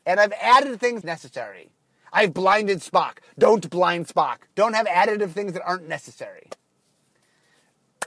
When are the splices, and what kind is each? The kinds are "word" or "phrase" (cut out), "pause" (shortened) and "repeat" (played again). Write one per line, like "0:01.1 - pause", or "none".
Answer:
0:01.0 - phrase
0:04.5 - pause